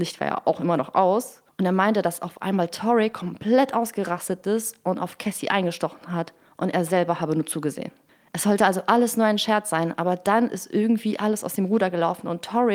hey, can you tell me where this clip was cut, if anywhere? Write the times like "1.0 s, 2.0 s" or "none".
none